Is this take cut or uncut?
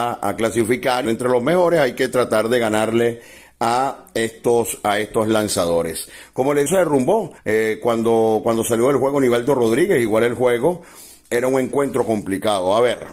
cut